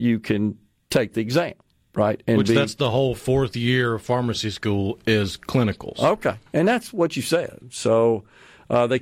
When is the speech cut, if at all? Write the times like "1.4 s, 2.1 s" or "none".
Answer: none